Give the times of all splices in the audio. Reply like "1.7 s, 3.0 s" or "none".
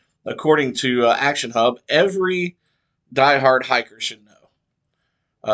none